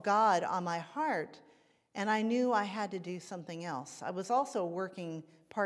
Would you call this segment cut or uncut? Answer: uncut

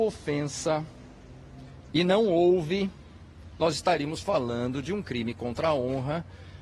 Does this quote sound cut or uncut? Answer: uncut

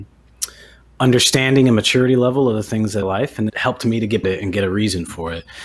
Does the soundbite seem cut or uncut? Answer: cut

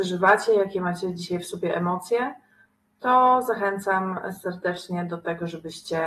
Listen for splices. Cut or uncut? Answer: uncut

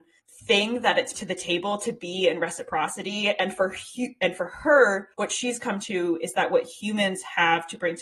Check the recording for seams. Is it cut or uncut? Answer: cut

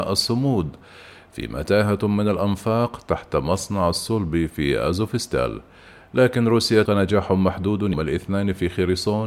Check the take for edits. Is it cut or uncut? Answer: cut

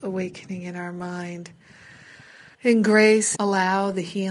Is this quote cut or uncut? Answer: cut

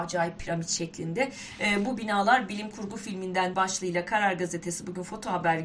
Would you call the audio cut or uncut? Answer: cut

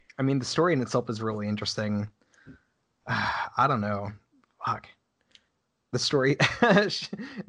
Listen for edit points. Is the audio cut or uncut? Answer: uncut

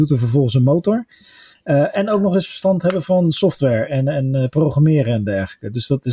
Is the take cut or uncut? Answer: uncut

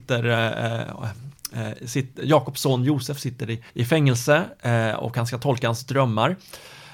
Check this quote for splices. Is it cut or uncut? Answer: cut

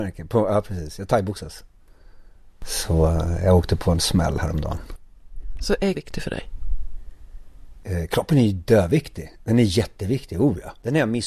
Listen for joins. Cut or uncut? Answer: cut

